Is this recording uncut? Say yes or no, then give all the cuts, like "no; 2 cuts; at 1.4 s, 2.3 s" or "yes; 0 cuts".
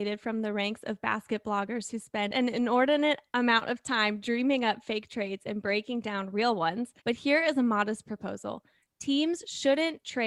no; 1 cut; at 7.0 s